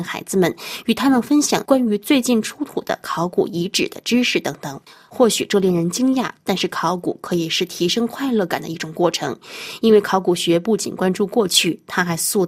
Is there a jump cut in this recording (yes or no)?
yes